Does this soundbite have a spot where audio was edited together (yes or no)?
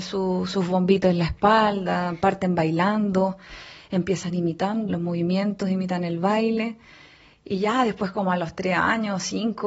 yes